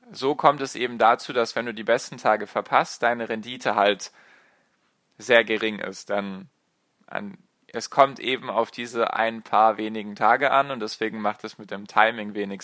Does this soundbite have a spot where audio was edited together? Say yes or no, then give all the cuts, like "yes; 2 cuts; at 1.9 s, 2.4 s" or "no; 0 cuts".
no; 0 cuts